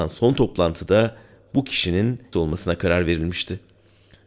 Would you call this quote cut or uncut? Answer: cut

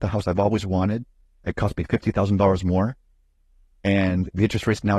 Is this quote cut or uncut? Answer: uncut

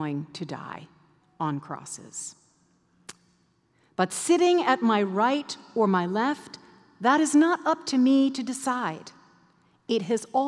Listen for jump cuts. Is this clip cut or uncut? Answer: uncut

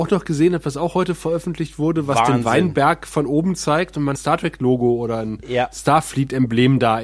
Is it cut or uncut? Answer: cut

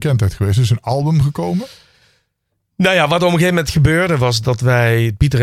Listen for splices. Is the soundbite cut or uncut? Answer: uncut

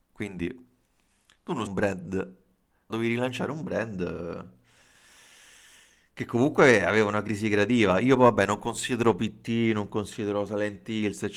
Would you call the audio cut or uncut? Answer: cut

